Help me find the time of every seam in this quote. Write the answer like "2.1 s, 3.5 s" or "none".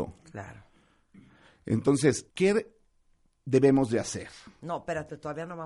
2.3 s